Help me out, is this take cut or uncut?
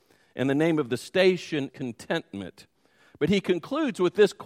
cut